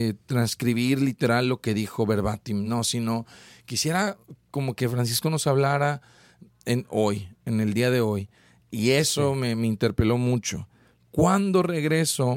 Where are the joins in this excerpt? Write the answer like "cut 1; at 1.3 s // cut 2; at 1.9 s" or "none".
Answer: none